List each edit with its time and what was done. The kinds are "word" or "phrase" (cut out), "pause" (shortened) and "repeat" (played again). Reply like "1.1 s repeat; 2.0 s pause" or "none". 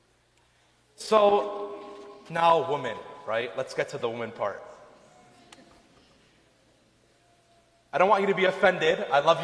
none